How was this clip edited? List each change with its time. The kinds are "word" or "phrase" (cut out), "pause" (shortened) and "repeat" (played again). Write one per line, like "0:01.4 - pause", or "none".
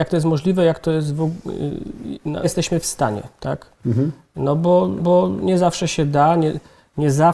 0:02.4 - phrase
0:05.0 - repeat